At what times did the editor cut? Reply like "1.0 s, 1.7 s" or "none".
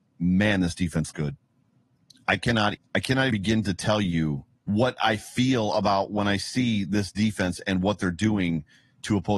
1.1 s, 2.0 s, 2.7 s, 3.3 s, 4.5 s